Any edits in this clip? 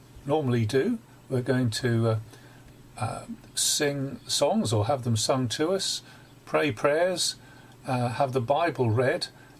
no; 0 cuts

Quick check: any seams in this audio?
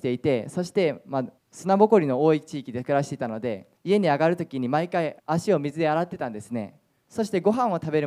yes; 4 cuts; at 1.4 s, 3.8 s, 5.2 s, 6.9 s

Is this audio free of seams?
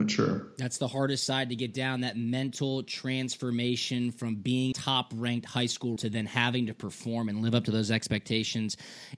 no; 2 cuts; at 4.7 s, 6.0 s

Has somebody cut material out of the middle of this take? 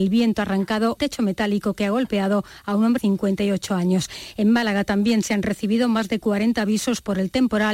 yes; 2 cuts; at 1.0 s, 3.0 s

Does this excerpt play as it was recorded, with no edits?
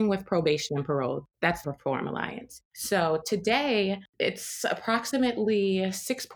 no; 1 cut; at 1.6 s

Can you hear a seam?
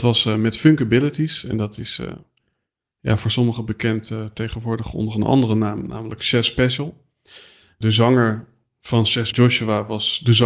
yes; 1 cut; at 9.3 s

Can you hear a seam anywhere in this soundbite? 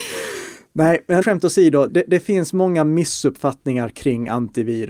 yes; 2 cuts; at 1.2 s, 1.9 s

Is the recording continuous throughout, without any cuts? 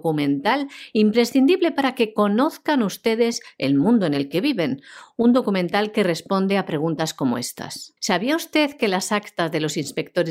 no; 1 cut; at 8.0 s

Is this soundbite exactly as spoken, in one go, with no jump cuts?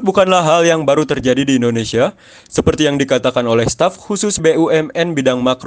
no; 1 cut; at 4.4 s

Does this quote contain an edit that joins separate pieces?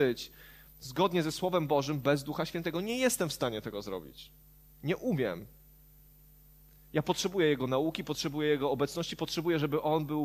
no; 0 cuts

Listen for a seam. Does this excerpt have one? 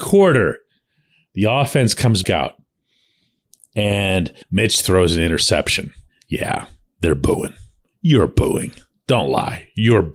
yes; 3 cuts; at 2.2 s, 4.4 s, 6.1 s

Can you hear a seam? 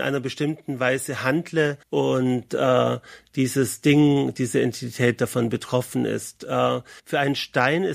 yes; 2 cuts; at 1.8 s, 7.0 s

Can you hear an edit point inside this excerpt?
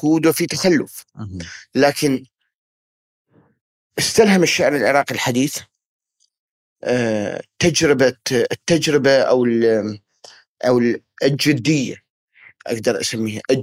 no; 0 cuts

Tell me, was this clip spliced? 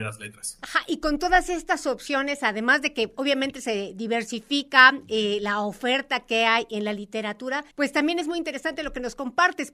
yes; 1 cut; at 7.7 s

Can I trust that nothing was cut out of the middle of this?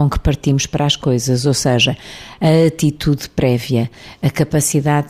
yes; 0 cuts

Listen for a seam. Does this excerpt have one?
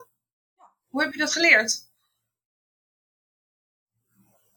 no; 0 cuts

